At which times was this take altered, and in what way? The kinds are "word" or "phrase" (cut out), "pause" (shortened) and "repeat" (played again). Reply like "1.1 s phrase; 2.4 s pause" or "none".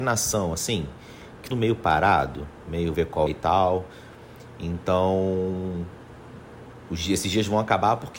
1.5 s word; 2.9 s word; 3.3 s word